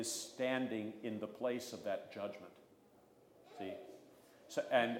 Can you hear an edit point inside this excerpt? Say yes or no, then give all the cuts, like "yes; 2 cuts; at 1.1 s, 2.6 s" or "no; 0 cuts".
no; 0 cuts